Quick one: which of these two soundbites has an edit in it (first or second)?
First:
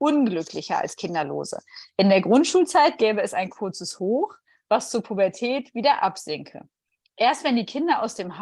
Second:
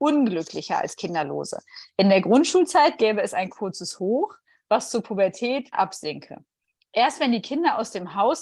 second